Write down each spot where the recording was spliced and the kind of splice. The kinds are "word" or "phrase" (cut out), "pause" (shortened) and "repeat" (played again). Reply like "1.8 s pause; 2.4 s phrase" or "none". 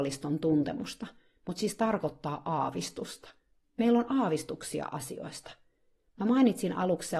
none